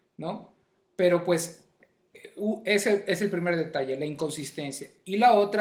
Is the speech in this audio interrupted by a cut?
no; 0 cuts

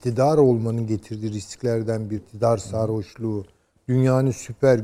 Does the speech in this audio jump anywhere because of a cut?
yes; 1 cut; at 2.2 s

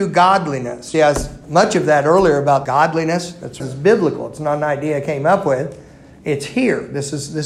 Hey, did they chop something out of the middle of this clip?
yes; 4 cuts; at 0.9 s, 1.4 s, 2.6 s, 3.6 s

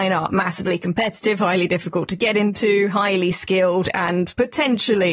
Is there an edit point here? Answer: no; 0 cuts

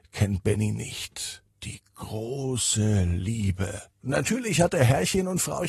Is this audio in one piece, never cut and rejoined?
no; 2 cuts; at 1.5 s, 3.9 s

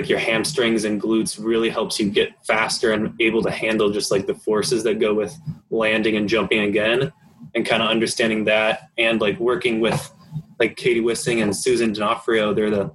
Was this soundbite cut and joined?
no; 0 cuts

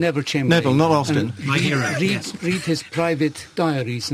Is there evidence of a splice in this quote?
no; 0 cuts

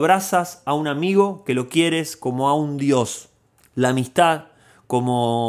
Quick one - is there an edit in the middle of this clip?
no; 0 cuts

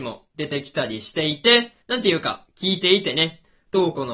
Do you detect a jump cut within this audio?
yes; 1 cut; at 1.8 s

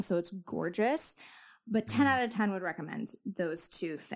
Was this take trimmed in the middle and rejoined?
no; 0 cuts

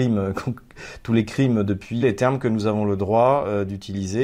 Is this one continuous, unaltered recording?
no; 1 cut; at 2.0 s

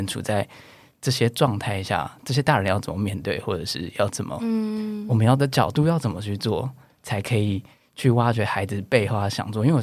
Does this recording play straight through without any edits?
yes; 0 cuts

